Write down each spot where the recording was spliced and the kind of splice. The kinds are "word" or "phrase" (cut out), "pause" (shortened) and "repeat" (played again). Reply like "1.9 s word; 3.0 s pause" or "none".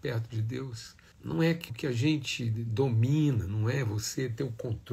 1.1 s pause; 1.7 s word